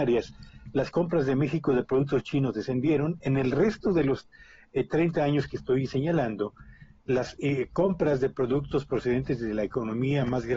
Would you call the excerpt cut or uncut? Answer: uncut